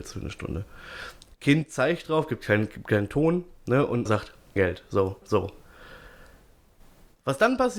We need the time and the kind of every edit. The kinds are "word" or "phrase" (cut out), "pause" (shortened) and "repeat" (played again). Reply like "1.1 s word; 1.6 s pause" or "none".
4.1 s word; 4.6 s word; 5.2 s word